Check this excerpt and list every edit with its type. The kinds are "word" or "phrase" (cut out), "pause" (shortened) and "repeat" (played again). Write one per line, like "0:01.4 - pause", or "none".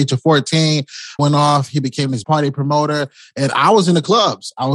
0:01.2 - phrase
0:02.2 - phrase